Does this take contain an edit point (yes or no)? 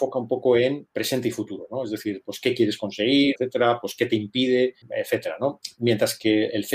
yes